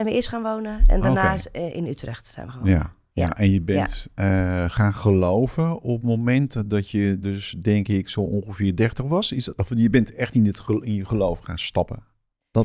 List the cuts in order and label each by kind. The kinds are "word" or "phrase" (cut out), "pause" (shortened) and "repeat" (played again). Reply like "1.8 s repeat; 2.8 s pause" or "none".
none